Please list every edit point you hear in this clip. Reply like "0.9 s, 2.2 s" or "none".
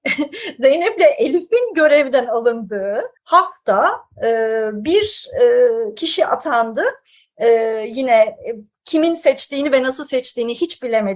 3.2 s